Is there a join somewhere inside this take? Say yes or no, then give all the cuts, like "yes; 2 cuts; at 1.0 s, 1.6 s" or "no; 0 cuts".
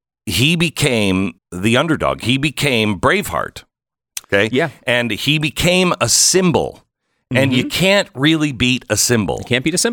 yes; 2 cuts; at 1.4 s, 4.2 s